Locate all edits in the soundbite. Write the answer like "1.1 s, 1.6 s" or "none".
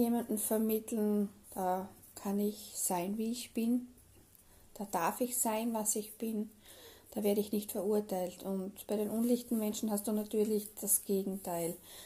1.4 s